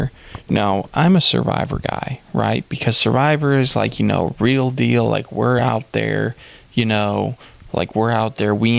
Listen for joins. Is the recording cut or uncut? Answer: uncut